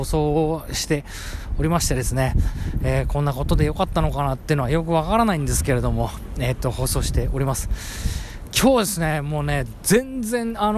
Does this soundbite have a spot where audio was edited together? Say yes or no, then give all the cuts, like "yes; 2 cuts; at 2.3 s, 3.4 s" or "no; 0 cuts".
no; 0 cuts